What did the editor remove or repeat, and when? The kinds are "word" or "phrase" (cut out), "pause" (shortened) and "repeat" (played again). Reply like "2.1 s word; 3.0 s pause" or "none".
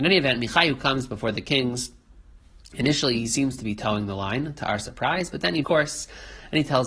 5.6 s word